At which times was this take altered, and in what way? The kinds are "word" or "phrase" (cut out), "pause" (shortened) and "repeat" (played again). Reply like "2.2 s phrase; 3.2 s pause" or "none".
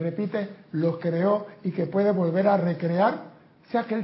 1.0 s word